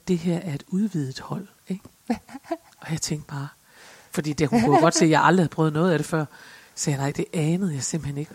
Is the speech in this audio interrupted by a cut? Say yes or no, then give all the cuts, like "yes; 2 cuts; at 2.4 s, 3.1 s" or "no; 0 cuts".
no; 0 cuts